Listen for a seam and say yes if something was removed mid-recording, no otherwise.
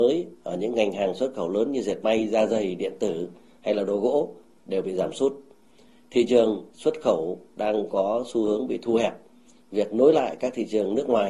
no